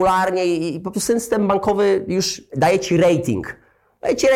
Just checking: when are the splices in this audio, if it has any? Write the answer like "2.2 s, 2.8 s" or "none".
0.9 s, 2.5 s

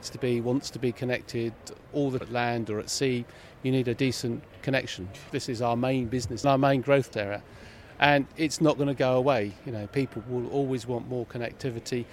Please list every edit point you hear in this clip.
2.2 s, 5.3 s, 6.4 s, 7.1 s

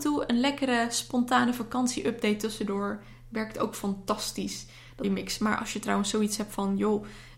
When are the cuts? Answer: 5.0 s

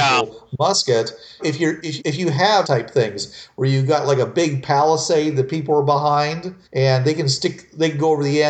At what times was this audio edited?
1.4 s, 2.0 s, 2.6 s, 6.6 s

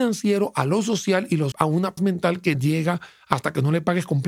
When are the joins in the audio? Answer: 1.5 s, 2.0 s, 2.5 s

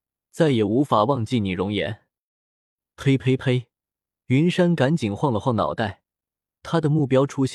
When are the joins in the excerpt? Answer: none

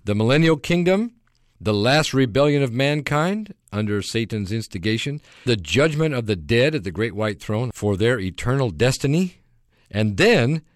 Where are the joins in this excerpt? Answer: 5.5 s

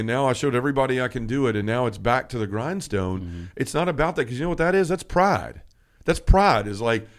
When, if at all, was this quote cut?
none

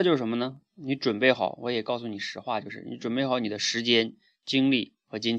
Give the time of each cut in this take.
none

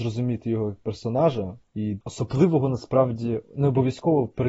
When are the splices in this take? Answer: 2.0 s

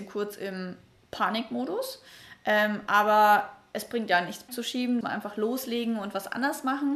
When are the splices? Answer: 4.5 s, 5.0 s

